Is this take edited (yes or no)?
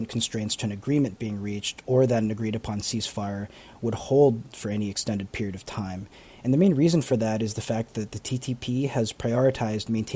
no